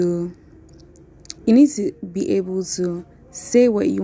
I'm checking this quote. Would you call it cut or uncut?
cut